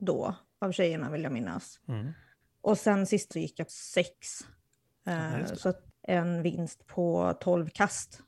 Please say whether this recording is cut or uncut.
cut